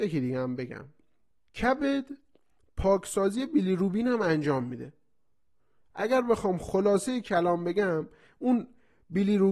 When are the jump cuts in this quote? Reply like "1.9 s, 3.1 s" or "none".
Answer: none